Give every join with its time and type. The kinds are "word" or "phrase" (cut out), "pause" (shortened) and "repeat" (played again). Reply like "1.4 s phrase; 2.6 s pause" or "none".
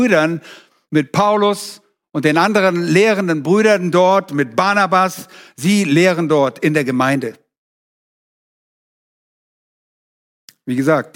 none

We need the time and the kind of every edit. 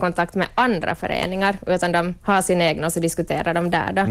2.2 s pause

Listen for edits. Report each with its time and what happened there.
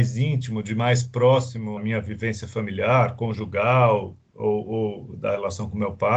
1.8 s word

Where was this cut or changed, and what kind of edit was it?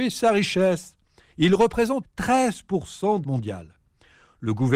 2.0 s word; 3.2 s word

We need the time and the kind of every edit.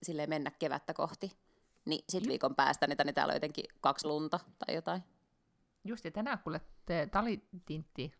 2.3 s word; 3.0 s repeat; 4.0 s word

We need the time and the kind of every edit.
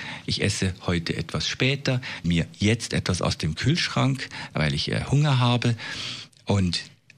2.2 s phrase

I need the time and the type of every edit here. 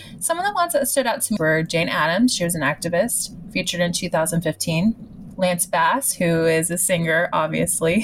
1.4 s phrase

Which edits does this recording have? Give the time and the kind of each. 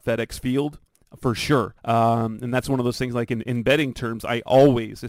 1.8 s pause

